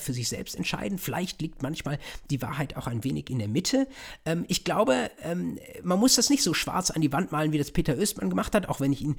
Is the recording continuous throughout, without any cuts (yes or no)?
yes